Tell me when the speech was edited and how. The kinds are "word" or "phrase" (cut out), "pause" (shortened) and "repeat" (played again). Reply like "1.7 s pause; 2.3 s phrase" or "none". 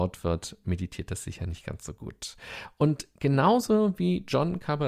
none